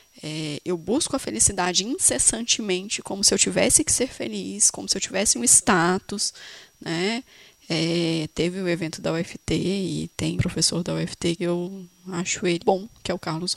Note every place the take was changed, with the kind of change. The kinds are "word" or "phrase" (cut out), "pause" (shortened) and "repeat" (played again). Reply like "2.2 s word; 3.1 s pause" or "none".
10.4 s word; 11.4 s word; 12.6 s word